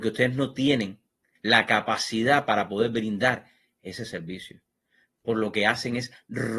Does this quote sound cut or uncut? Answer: uncut